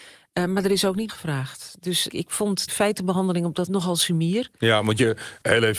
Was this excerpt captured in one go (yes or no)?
no